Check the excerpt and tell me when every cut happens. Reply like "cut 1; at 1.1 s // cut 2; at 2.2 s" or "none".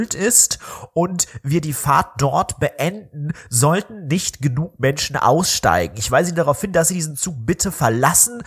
none